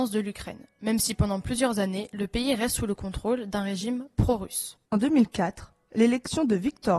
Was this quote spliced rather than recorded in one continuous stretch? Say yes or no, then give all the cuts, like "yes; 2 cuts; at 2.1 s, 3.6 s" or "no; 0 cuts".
yes; 1 cut; at 4.9 s